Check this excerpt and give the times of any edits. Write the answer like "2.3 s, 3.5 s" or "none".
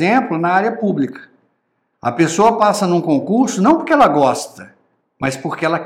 none